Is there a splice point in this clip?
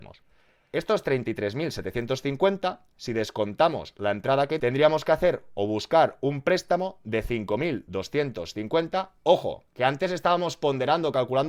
yes; 1 cut; at 4.6 s

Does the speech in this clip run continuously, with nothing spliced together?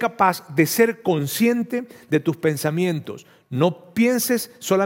yes; 0 cuts

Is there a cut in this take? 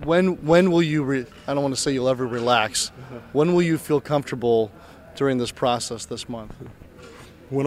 no; 0 cuts

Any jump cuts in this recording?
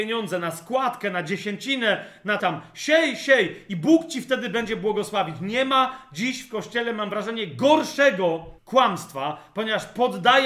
yes; 2 cuts; at 2.4 s, 8.6 s

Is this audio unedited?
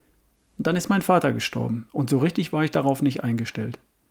no; 1 cut; at 1.9 s

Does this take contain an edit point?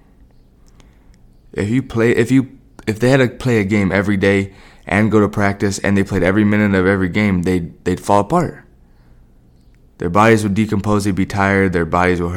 no; 0 cuts

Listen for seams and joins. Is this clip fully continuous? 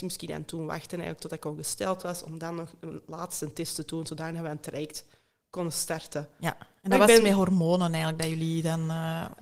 yes; 0 cuts

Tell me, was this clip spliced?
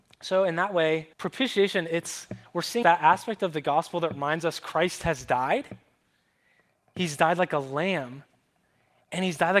yes; 2 cuts; at 1.1 s, 2.8 s

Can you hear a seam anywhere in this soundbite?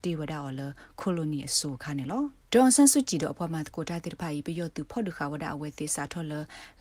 yes; 1 cut; at 2.4 s

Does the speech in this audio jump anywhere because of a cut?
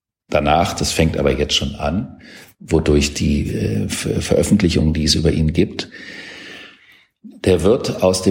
no; 0 cuts

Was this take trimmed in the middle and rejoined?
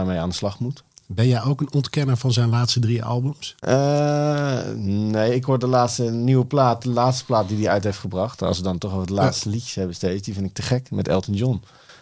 yes; 1 cut; at 3.6 s

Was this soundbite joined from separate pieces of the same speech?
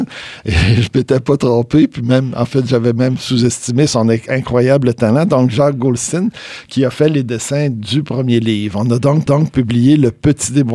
yes; 1 cut; at 9.3 s

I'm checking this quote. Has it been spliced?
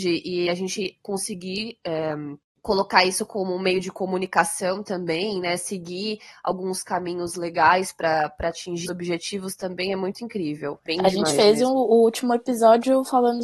yes; 3 cuts; at 2.4 s, 8.9 s, 10.9 s

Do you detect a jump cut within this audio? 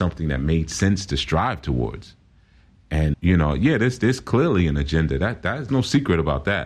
yes; 2 cuts; at 3.1 s, 5.7 s

